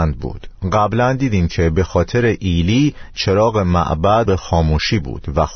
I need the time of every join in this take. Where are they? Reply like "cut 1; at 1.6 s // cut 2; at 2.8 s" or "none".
cut 1; at 4.3 s